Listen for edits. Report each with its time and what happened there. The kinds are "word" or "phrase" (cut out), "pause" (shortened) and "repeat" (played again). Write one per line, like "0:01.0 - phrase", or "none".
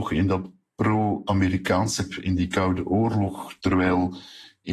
0:02.1 - word